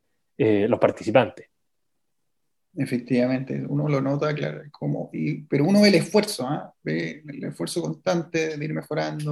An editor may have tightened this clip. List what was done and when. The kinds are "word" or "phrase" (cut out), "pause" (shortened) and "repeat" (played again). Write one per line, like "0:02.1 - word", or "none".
none